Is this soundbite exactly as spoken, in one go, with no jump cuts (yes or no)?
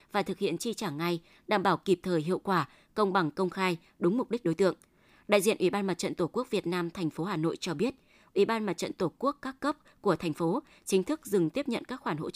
yes